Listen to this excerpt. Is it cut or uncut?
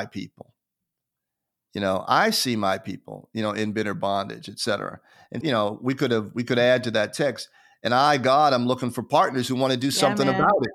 cut